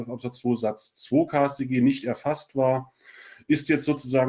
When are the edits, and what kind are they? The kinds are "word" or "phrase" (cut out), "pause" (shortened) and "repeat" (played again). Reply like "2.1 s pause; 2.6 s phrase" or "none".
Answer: none